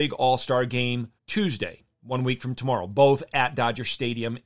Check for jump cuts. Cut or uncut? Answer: cut